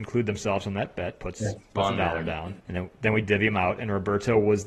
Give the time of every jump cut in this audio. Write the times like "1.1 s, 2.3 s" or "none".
2.6 s